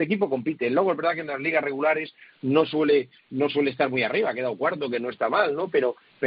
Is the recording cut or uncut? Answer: uncut